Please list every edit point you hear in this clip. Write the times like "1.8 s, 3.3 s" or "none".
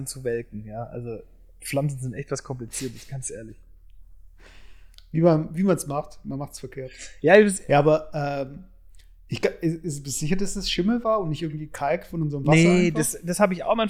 none